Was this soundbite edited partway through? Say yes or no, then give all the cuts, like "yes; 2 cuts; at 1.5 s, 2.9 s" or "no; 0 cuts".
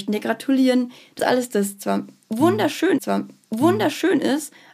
yes; 2 cuts; at 1.2 s, 3.0 s